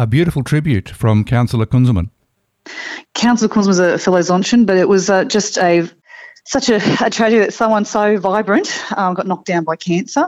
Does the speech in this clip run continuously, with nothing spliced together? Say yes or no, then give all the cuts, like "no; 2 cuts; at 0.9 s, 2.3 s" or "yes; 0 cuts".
yes; 0 cuts